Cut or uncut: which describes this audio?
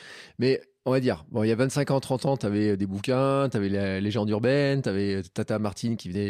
uncut